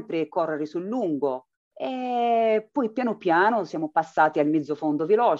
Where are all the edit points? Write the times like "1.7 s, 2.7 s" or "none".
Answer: 1.5 s